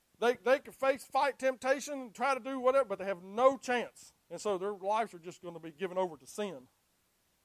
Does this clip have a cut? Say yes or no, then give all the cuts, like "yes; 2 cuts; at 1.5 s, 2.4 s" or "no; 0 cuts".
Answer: yes; 1 cut; at 4.2 s